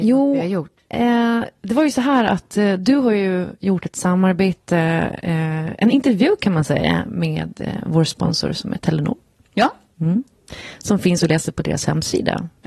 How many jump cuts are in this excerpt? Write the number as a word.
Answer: zero